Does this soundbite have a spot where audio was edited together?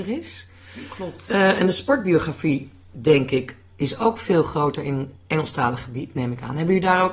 no; 0 cuts

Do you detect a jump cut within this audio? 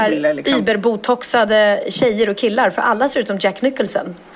no; 0 cuts

